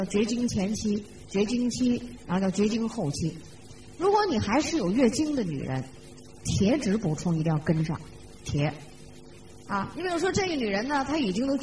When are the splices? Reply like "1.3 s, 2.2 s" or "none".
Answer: none